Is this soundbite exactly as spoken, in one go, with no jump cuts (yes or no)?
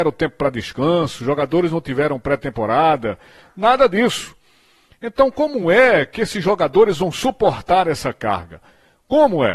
yes